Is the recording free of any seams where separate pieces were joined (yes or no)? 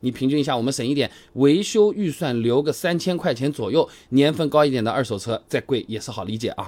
yes